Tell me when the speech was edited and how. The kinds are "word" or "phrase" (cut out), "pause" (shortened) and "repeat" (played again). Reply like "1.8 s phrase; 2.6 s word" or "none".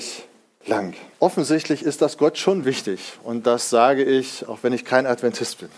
1.1 s pause; 2.6 s word